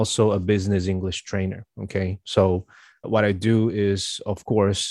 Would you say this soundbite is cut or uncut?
cut